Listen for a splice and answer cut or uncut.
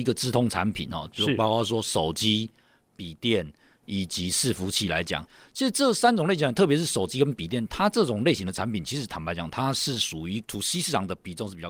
uncut